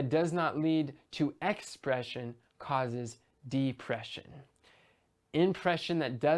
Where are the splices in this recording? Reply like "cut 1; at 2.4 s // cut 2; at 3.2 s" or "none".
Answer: none